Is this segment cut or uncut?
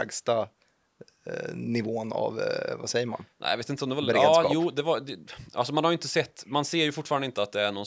uncut